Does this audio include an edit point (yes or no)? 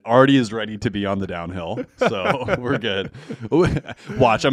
no